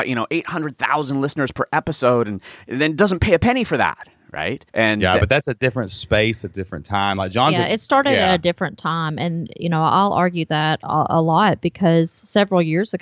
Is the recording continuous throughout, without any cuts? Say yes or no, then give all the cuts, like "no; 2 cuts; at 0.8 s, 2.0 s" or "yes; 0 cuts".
no; 1 cut; at 4.7 s